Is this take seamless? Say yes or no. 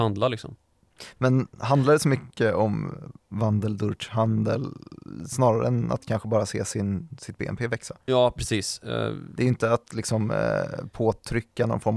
no